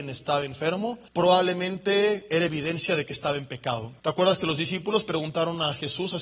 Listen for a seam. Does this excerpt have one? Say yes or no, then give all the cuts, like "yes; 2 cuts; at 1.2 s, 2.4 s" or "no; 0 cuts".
yes; 2 cuts; at 1.1 s, 4.0 s